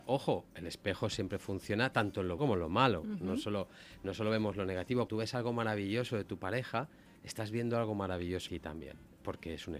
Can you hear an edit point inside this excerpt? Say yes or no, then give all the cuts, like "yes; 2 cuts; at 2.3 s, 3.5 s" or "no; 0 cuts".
yes; 3 cuts; at 2.4 s, 5.1 s, 8.5 s